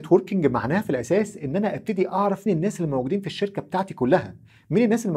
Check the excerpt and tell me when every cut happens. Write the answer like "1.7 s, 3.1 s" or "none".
2.5 s